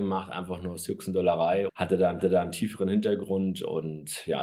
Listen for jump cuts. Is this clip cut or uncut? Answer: cut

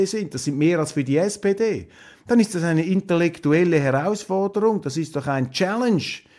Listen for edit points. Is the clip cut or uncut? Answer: uncut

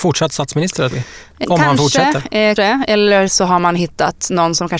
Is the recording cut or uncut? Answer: cut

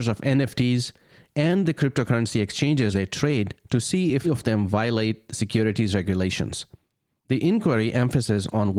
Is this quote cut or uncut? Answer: cut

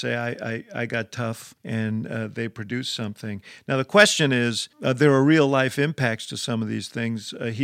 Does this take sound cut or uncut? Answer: cut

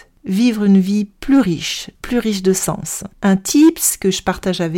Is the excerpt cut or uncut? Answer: cut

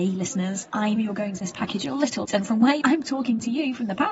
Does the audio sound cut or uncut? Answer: cut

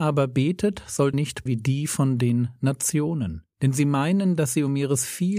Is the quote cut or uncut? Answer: cut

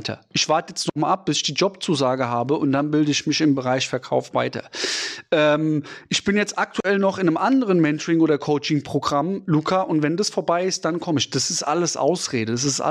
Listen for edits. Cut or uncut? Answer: uncut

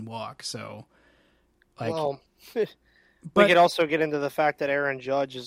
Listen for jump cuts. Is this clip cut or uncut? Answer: cut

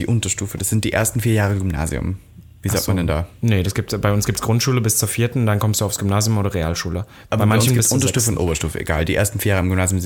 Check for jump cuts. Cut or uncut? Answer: uncut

